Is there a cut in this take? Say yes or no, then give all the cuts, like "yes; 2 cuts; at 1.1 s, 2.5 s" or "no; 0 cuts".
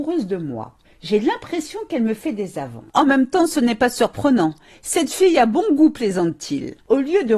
no; 0 cuts